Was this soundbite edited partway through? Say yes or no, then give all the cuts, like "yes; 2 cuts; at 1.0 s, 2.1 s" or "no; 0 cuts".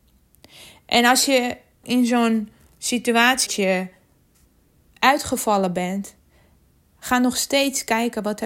yes; 2 cuts; at 1.8 s, 3.5 s